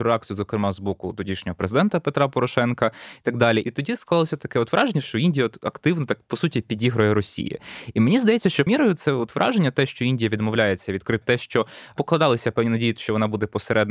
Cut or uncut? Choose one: cut